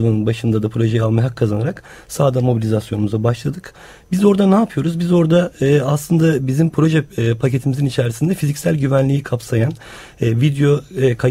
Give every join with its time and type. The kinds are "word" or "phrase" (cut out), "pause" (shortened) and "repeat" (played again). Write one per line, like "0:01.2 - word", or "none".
none